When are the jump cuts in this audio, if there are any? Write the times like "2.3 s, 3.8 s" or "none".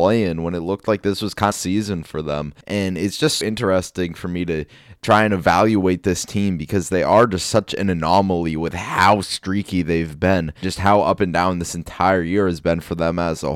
1.5 s, 2.6 s, 3.4 s, 10.6 s